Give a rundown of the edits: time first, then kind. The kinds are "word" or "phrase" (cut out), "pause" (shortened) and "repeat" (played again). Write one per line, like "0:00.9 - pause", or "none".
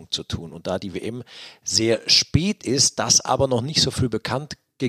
none